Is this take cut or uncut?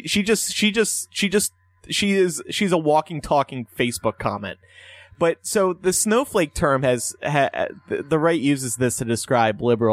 uncut